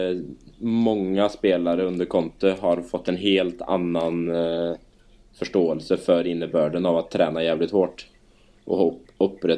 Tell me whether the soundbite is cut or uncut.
uncut